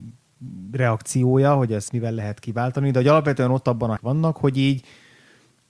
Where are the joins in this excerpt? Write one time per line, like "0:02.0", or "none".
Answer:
0:01.9
0:04.0